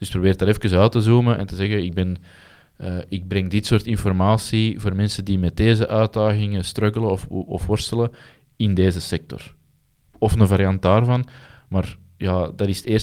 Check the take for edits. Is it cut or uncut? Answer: uncut